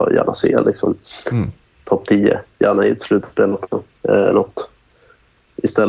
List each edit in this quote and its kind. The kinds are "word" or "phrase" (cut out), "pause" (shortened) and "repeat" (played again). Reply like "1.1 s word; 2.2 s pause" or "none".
4.3 s word